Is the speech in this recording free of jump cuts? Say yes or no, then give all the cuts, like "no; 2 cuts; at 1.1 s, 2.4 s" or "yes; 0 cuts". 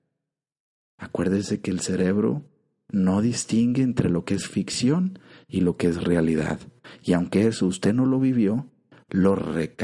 yes; 0 cuts